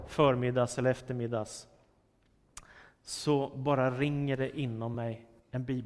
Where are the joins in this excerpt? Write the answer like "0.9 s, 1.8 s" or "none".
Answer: none